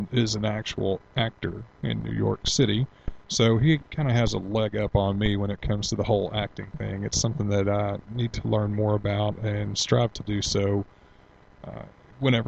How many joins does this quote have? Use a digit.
0